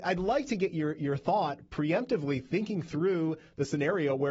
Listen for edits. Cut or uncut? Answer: uncut